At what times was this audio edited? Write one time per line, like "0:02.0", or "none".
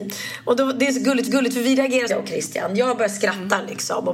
0:01.3
0:02.1